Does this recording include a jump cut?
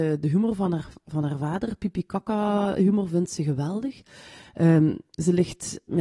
no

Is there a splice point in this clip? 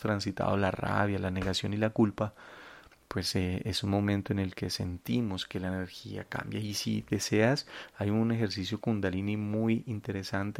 no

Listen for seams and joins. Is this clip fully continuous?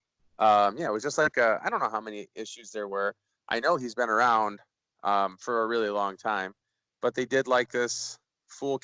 yes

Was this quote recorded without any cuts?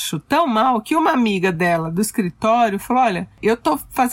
yes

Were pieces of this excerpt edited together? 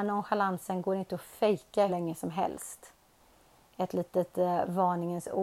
yes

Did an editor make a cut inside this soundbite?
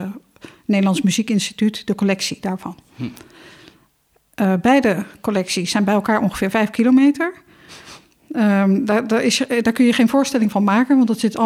no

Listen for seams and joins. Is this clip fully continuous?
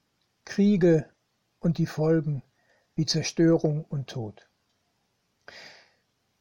yes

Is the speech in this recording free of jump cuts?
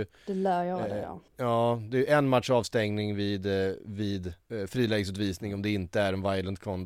no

